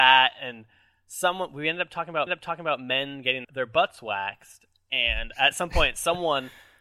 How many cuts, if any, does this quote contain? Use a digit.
2